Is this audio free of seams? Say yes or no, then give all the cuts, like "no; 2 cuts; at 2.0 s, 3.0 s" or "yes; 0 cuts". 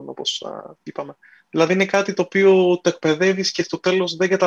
yes; 0 cuts